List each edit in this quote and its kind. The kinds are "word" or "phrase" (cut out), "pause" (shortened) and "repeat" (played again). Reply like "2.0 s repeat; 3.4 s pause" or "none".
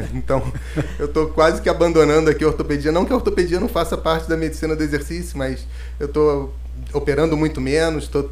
none